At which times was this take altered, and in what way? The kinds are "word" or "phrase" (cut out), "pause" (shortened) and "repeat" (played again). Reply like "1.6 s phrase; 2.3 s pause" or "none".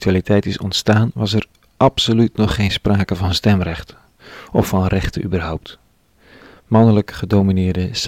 none